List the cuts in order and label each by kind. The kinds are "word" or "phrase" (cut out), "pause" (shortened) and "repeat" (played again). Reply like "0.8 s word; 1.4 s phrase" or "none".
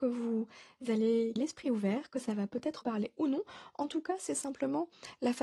1.4 s word; 2.8 s word